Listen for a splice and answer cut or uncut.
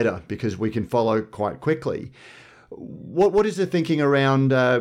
uncut